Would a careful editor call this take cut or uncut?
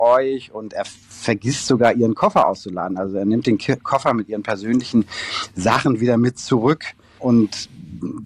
uncut